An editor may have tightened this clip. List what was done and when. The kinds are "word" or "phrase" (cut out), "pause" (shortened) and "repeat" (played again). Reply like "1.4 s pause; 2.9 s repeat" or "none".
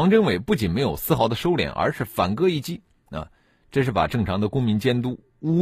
none